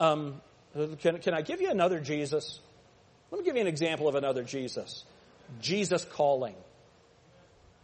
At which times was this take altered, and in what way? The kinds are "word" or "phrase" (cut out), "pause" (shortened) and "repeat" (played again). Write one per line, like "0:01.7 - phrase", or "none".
none